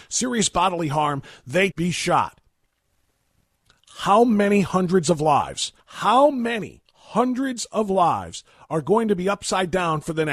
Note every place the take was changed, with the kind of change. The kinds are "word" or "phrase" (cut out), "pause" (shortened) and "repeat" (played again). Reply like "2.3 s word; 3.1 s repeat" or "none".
1.7 s phrase; 5.8 s pause; 6.8 s pause